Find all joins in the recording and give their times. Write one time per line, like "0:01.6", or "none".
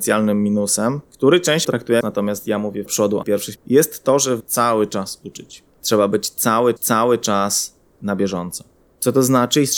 0:01.6
0:02.0
0:02.9
0:03.2
0:03.6
0:04.4
0:06.8

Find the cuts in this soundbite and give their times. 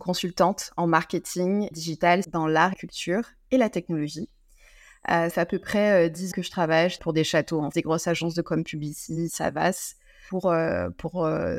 0:01.7
0:02.2
0:02.7
0:05.3
0:06.3
0:07.0
0:07.7
0:08.4

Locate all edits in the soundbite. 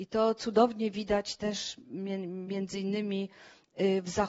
none

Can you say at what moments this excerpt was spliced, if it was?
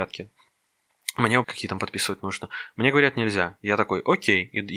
0:01.4

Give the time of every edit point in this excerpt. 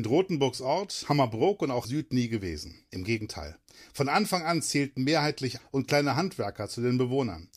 0:01.8
0:05.6

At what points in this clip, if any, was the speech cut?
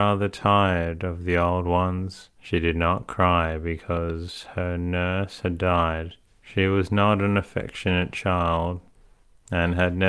0:02.3
0:06.3

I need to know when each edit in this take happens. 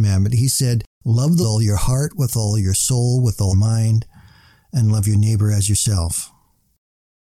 0:00.9
0:01.4
0:03.5

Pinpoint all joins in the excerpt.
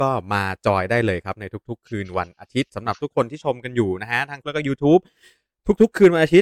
0:04.4

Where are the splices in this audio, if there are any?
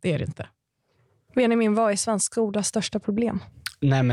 none

